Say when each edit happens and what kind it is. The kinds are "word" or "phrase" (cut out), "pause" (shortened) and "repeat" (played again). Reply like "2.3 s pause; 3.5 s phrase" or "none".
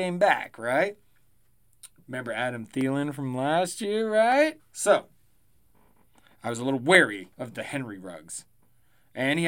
4.6 s pause; 7.3 s pause